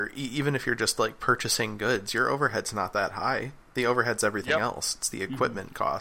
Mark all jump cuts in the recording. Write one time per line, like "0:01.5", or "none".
none